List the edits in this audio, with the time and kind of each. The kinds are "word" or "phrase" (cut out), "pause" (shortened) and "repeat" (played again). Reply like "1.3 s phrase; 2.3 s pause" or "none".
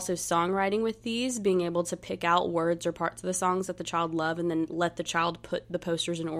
none